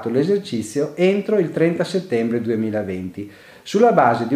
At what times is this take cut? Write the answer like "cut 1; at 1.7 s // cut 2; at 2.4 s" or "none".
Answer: none

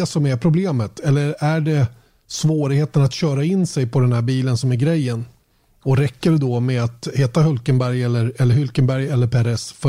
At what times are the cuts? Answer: none

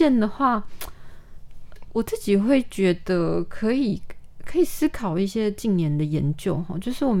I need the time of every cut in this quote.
cut 1; at 1.8 s

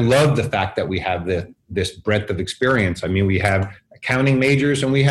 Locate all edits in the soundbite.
none

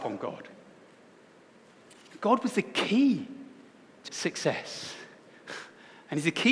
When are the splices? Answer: cut 1; at 4.1 s

